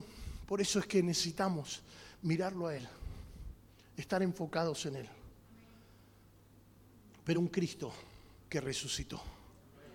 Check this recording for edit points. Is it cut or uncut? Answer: uncut